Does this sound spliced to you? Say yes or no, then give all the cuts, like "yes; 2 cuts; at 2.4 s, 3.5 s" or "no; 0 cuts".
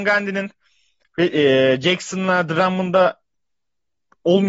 no; 0 cuts